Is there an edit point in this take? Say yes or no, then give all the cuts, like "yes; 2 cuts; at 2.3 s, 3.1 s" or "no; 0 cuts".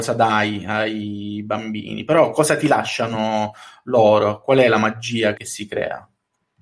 yes; 1 cut; at 5.4 s